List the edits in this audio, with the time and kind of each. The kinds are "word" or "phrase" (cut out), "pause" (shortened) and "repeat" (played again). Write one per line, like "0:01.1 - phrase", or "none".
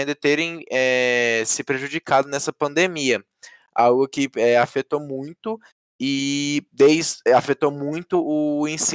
none

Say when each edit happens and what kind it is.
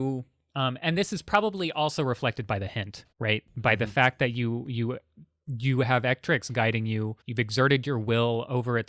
0:03.1 - pause
0:07.2 - pause

